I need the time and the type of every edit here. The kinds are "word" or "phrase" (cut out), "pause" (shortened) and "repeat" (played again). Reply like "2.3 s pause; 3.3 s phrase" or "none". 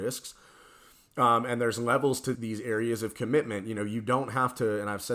2.3 s word